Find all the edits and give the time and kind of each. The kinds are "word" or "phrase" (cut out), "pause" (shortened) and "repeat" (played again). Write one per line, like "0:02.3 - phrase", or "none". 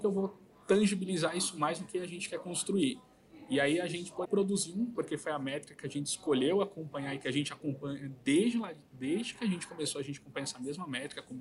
0:04.2 - word
0:04.9 - phrase